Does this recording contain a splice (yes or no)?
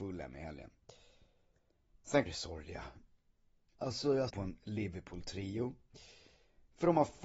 yes